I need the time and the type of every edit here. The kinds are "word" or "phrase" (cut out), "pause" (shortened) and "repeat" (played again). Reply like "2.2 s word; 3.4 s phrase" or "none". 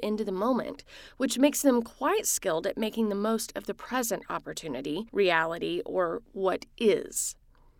5.1 s pause